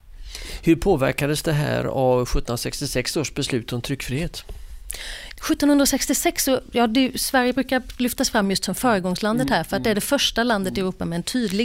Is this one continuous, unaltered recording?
yes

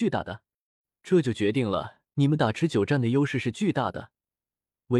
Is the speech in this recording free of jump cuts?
no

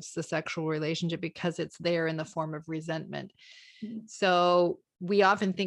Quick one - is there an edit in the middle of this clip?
no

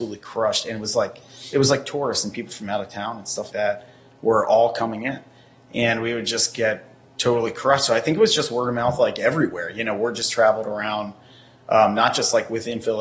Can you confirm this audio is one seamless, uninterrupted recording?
no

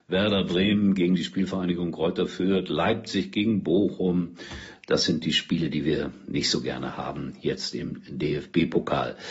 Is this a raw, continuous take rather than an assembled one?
yes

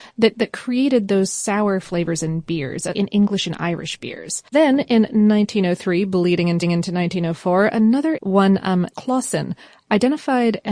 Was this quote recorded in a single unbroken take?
no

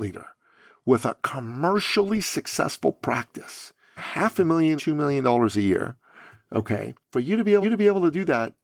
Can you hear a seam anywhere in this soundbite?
yes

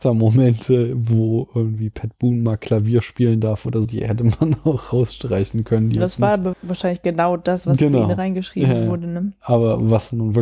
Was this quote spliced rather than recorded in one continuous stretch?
yes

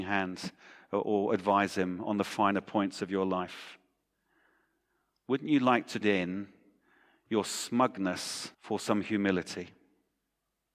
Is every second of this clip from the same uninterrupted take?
no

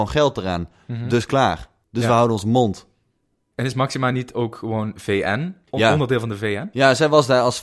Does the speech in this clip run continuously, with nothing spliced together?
yes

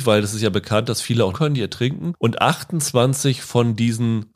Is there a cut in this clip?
yes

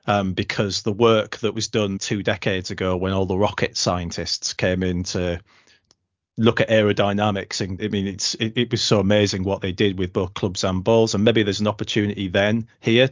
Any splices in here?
yes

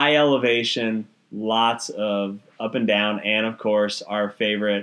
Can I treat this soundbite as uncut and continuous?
yes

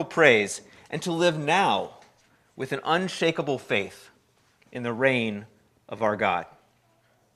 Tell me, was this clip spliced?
no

